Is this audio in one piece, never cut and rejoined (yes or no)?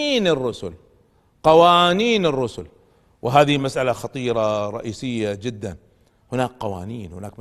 yes